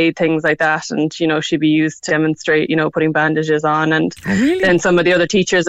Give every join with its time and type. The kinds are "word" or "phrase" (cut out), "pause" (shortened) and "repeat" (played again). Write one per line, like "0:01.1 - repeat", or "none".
0:02.1 - word